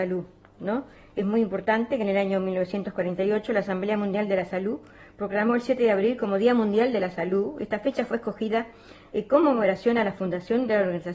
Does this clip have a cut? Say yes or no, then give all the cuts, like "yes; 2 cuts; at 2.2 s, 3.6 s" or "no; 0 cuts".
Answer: no; 0 cuts